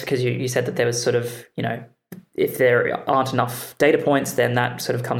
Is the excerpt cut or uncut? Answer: uncut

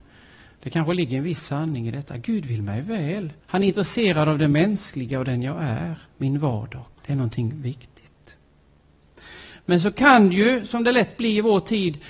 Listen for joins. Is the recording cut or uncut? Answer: cut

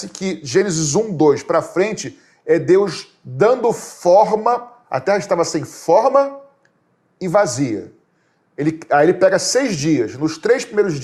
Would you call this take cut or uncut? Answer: uncut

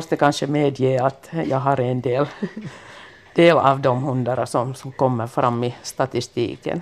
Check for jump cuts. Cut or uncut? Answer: uncut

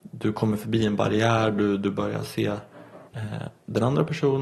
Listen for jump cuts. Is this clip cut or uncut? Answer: cut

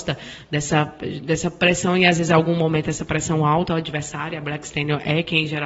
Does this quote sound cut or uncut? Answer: uncut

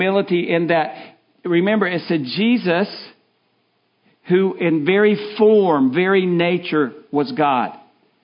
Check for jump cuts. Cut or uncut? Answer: uncut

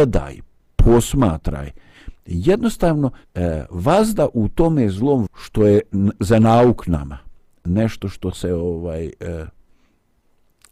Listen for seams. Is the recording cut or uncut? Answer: cut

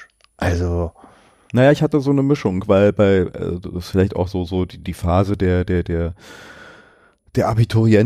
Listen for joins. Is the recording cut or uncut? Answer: uncut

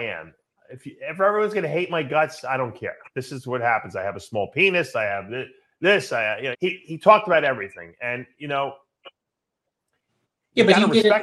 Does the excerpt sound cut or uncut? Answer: cut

